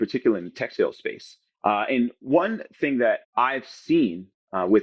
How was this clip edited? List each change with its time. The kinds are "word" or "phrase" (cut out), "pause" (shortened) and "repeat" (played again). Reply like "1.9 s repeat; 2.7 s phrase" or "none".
3.2 s pause

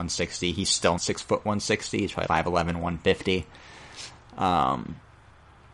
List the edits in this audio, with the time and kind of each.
1.0 s word; 2.3 s word

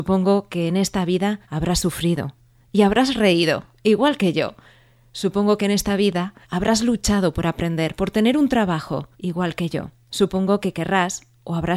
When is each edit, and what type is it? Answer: 1.4 s pause; 6.4 s pause; 9.1 s pause; 10.0 s pause

